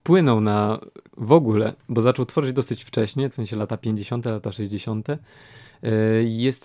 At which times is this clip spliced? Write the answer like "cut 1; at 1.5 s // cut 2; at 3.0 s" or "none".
cut 1; at 1.1 s // cut 2; at 3.3 s